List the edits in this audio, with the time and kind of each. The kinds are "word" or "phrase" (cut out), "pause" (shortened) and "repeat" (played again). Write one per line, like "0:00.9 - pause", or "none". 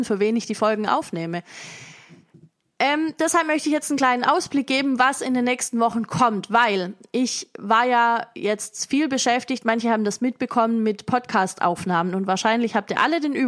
0:08.3 - word